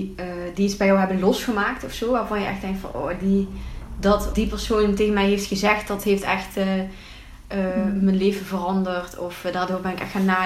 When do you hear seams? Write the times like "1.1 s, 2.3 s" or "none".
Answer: 4.3 s